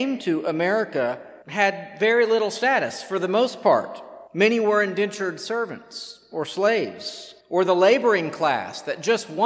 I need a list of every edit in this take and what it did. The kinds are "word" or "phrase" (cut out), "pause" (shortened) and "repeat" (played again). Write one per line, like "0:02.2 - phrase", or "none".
0:01.4 - pause
0:04.3 - pause
0:07.4 - pause